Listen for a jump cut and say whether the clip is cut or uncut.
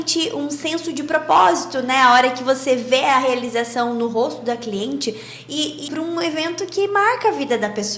cut